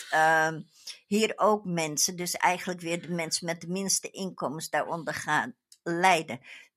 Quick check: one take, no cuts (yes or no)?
no